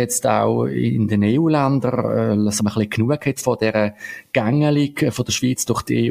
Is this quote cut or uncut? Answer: cut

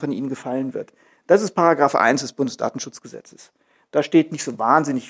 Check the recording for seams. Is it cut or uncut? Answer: uncut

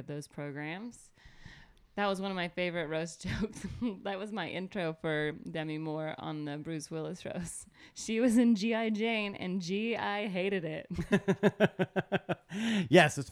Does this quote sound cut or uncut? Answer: uncut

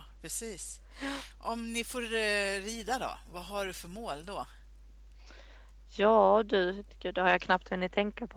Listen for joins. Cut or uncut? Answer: uncut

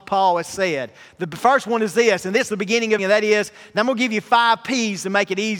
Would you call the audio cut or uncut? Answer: cut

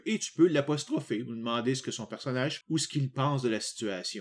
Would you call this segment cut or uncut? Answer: cut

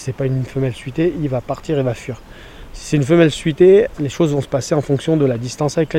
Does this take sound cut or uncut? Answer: uncut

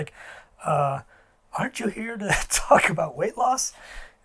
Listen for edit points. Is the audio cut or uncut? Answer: uncut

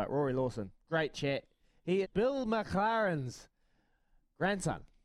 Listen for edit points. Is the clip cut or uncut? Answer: cut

